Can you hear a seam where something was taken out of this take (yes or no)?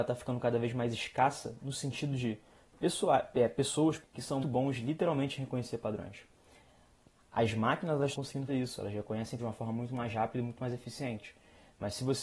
yes